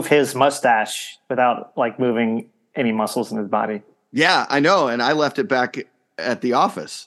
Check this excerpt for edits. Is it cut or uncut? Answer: uncut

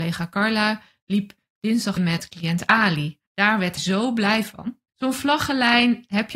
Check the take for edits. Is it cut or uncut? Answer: cut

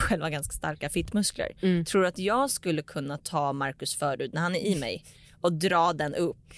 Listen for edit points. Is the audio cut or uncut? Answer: uncut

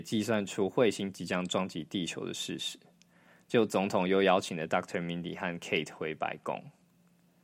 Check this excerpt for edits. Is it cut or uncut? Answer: uncut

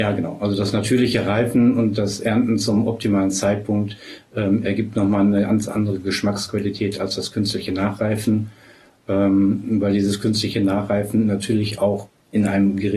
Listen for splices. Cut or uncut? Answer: uncut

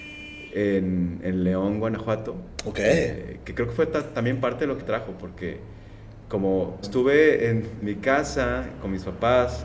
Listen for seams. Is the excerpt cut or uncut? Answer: cut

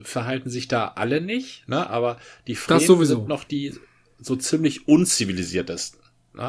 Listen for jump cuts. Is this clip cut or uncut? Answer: uncut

